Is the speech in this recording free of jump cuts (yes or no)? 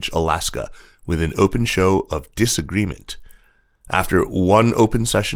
yes